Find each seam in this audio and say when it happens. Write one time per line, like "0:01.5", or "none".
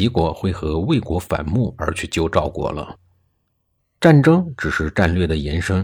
none

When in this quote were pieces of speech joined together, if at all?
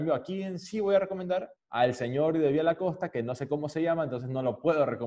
0:01.6

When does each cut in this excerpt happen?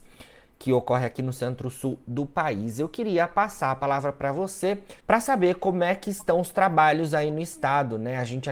0:05.0

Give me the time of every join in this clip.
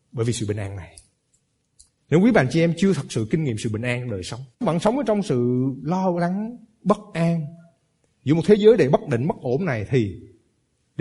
0:04.5

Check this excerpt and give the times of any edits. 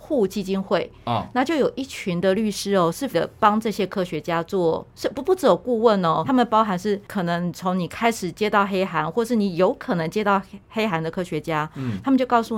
0:03.1
0:06.2

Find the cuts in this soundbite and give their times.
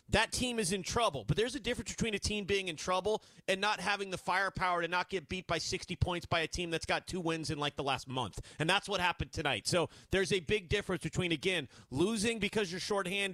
none

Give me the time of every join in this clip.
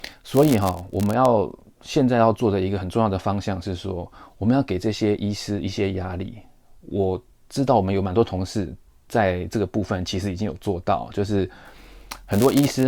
none

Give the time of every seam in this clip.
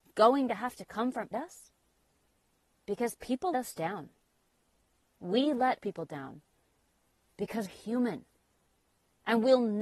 0:01.3
0:03.5
0:05.8
0:07.7

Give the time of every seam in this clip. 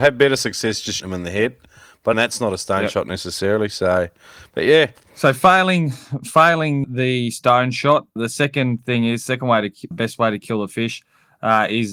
0:01.0
0:02.1
0:06.8
0:08.2
0:09.9

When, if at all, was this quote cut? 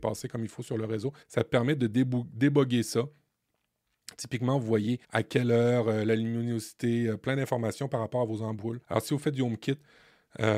0:01.2
0:05.0
0:08.8

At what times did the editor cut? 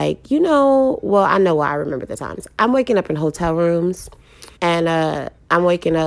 0:04.6

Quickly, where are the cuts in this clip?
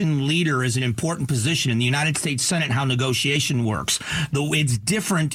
none

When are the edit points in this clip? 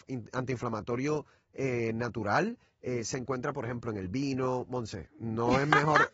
none

